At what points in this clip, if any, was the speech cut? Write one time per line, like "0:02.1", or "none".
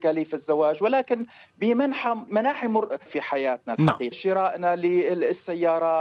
0:02.3
0:03.1
0:04.1